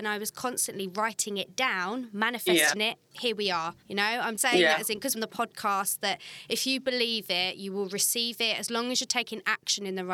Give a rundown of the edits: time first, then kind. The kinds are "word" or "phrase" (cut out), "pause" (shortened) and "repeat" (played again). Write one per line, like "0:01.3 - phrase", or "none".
0:03.8 - pause
0:04.4 - word
0:05.1 - word